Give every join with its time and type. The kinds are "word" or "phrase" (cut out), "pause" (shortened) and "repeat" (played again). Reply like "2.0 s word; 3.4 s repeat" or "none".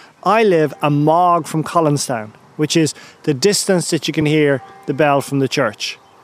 none